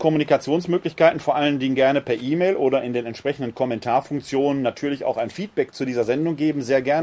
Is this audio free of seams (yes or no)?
yes